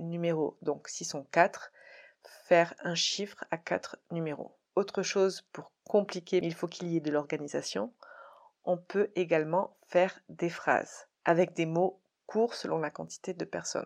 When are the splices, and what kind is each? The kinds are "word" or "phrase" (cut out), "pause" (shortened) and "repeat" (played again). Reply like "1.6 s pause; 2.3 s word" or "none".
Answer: none